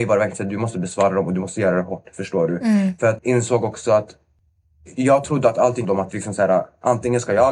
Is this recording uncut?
no; 2 cuts; at 3.2 s, 5.8 s

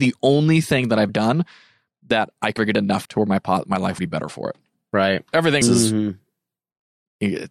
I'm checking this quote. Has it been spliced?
yes; 5 cuts; at 1.1 s, 2.6 s, 3.0 s, 4.0 s, 5.6 s

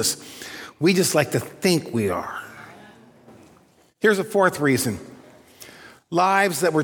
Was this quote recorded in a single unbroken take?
yes; 0 cuts

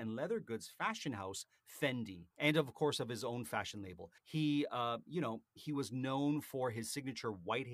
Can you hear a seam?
yes; 2 cuts; at 2.3 s, 4.2 s

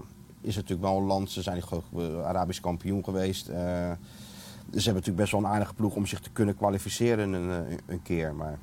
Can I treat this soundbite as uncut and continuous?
yes; 0 cuts

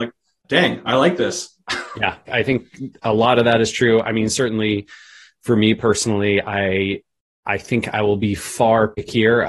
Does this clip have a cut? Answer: no; 0 cuts

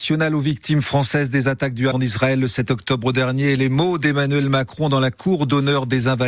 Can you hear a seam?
yes; 1 cut; at 1.9 s

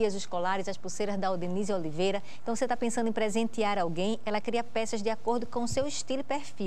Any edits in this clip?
no; 0 cuts

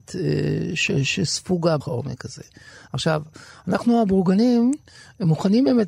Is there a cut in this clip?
yes; 1 cut; at 1.8 s

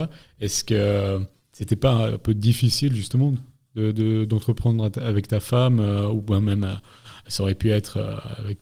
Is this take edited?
no; 0 cuts

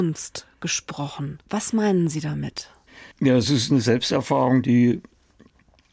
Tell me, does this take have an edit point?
yes; 2 cuts; at 1.4 s, 3.1 s

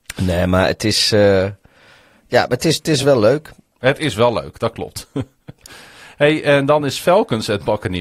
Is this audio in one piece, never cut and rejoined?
yes; 0 cuts

